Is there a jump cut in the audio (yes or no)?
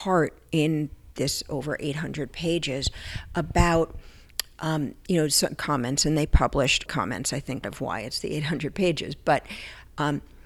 yes